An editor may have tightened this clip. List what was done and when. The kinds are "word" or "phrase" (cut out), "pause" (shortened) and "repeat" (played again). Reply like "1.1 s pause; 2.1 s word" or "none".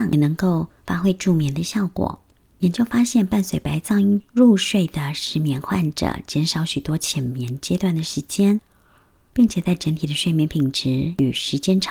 none